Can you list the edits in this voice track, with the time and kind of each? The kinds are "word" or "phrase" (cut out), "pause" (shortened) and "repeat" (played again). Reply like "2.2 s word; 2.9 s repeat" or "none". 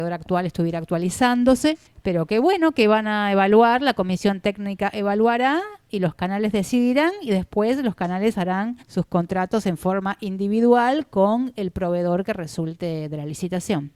1.9 s pause; 8.8 s pause